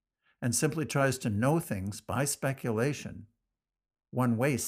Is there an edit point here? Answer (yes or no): no